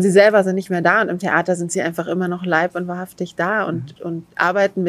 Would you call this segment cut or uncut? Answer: cut